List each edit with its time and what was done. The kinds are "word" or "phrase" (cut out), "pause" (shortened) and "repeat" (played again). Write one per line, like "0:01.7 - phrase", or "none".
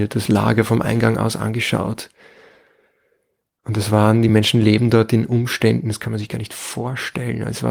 none

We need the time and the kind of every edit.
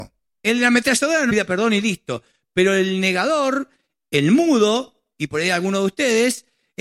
0:01.3 - phrase

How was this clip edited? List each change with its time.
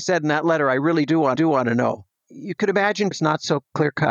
0:01.3 - repeat
0:03.1 - phrase

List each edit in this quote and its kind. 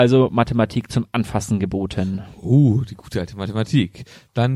none

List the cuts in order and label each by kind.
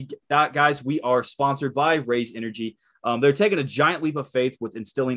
none

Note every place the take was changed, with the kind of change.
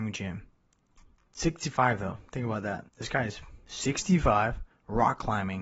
0:02.9 - pause
0:04.7 - pause

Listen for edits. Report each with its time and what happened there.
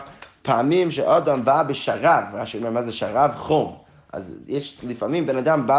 none

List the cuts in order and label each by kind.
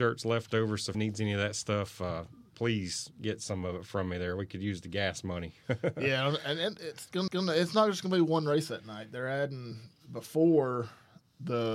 0:00.9 - word
0:07.3 - repeat

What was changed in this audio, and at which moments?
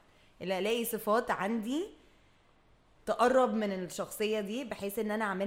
none

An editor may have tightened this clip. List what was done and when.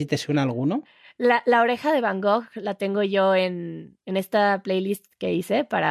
none

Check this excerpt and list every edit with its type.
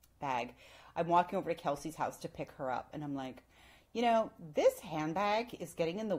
none

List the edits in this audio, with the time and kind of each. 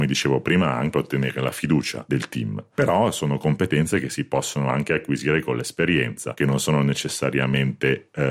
0:00.9 - word

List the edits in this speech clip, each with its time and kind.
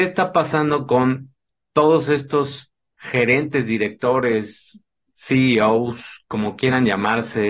none

